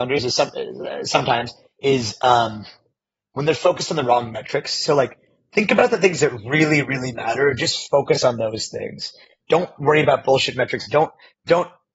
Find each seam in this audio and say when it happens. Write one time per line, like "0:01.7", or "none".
none